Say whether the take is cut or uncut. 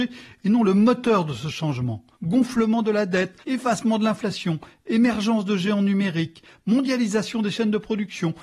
cut